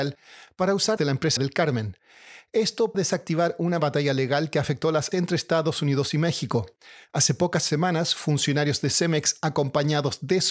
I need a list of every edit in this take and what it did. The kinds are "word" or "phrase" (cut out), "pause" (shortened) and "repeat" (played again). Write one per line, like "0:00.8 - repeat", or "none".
0:01.0 - phrase
0:01.4 - phrase
0:02.9 - word
0:05.1 - word